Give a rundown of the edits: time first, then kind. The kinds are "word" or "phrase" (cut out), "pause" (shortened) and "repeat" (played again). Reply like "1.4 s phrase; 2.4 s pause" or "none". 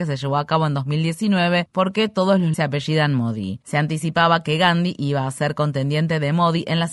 2.5 s word